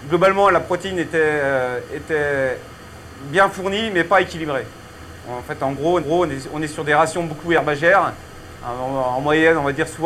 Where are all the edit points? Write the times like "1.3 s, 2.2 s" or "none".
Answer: 6.0 s